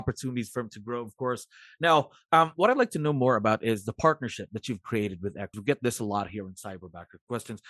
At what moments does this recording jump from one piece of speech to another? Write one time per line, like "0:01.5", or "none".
0:05.5